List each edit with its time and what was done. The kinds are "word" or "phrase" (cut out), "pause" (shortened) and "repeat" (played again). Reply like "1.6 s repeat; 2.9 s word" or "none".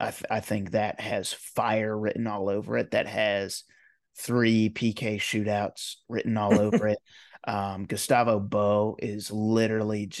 none